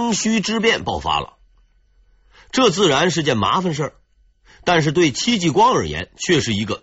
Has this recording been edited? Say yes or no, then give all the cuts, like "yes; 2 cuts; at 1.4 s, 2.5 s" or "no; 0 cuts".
no; 0 cuts